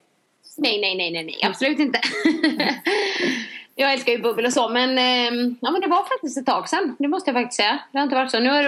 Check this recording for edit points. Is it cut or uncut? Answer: uncut